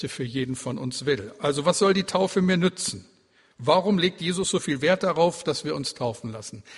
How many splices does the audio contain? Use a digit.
0